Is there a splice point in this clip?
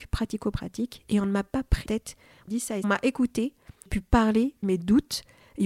yes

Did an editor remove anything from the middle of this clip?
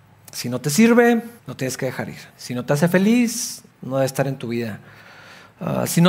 yes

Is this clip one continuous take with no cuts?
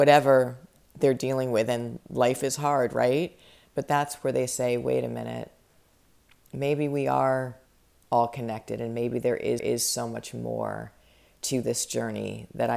no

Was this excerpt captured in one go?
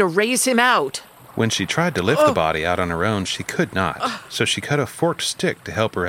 yes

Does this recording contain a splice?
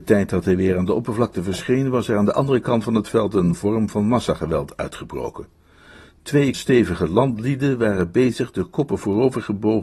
yes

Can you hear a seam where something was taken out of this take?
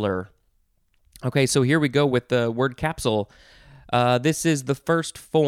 no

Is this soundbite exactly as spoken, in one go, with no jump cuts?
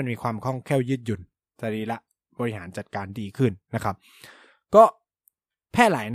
yes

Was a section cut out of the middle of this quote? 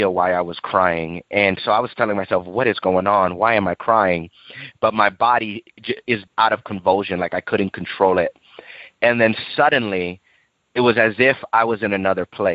yes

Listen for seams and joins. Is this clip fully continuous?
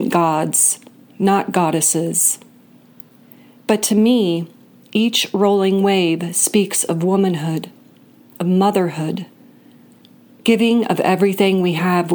yes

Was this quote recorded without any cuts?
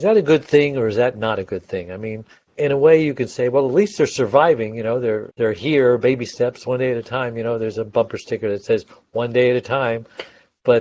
no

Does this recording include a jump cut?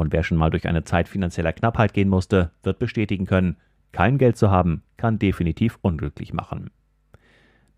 no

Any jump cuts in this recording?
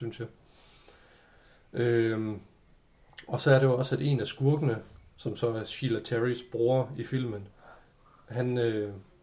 no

